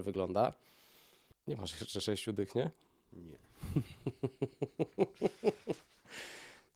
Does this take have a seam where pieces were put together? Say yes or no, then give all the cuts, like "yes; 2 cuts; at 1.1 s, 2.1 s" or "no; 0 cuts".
no; 0 cuts